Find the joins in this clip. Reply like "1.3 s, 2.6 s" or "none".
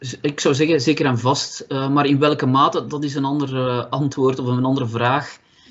none